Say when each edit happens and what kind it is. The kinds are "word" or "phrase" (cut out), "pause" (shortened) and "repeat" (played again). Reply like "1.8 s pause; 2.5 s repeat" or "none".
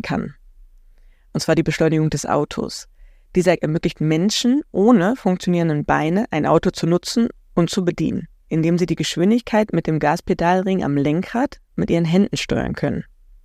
3.6 s word